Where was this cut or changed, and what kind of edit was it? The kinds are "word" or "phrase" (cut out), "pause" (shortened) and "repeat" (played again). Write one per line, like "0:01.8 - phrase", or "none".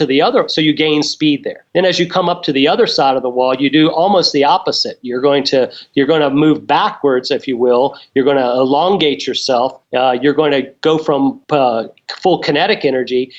0:01.7 - pause
0:09.8 - pause
0:11.4 - pause